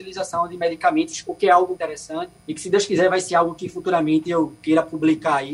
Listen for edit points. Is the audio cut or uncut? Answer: cut